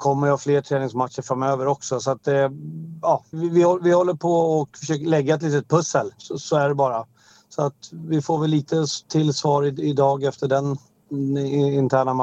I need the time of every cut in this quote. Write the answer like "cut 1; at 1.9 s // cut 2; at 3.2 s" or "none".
cut 1; at 3.3 s // cut 2; at 5.0 s